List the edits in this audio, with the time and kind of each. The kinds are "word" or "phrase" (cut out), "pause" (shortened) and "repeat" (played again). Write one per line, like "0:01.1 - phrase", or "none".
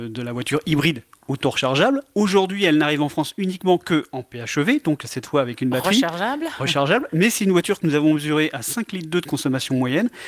none